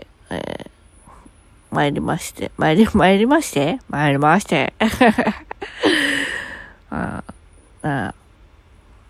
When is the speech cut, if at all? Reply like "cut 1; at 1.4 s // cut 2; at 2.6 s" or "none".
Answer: none